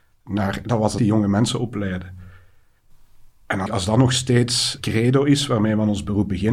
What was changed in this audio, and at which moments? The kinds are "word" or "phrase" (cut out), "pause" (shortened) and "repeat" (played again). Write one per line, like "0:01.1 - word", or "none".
0:01.0 - word
0:03.7 - word
0:04.8 - word